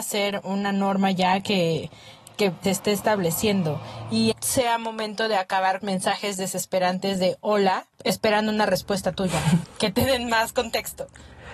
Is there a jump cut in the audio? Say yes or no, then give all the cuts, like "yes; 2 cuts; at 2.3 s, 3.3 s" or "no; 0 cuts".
yes; 5 cuts; at 2.6 s, 4.3 s, 5.8 s, 7.9 s, 9.6 s